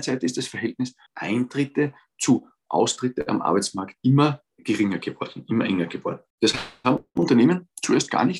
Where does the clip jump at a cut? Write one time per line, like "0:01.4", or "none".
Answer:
0:01.1
0:04.5
0:06.3